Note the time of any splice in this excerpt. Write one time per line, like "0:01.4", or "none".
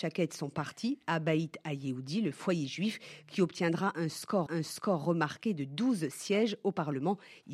0:04.5